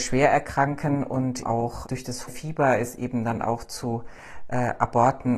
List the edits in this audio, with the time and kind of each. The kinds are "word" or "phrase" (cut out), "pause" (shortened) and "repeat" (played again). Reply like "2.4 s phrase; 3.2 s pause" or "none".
1.4 s word; 1.8 s word; 2.3 s word